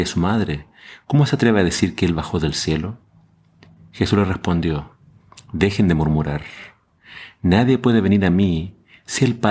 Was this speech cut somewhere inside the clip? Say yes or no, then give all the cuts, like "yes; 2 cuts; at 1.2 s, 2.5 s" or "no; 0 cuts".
no; 0 cuts